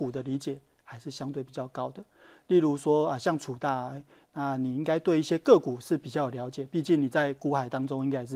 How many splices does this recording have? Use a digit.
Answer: 0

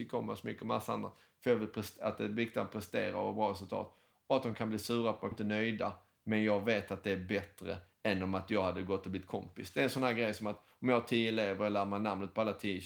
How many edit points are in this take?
2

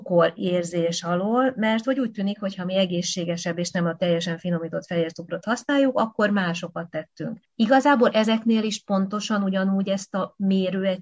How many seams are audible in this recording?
0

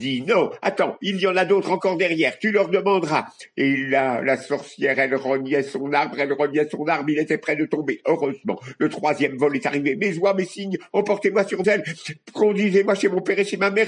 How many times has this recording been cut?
1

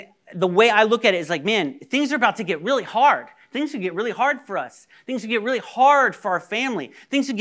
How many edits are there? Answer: 0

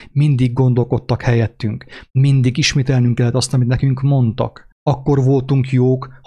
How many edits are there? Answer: 1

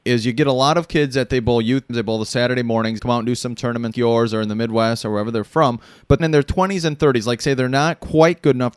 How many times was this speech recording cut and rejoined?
4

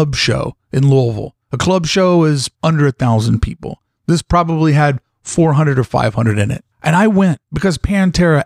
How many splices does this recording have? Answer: 4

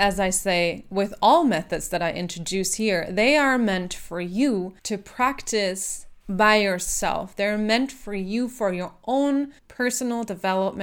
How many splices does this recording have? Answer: 3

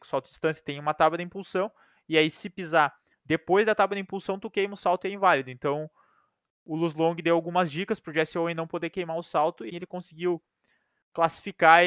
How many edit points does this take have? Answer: 1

